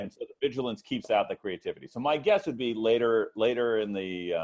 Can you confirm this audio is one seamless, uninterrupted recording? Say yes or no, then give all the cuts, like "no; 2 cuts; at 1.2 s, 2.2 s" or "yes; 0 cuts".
yes; 0 cuts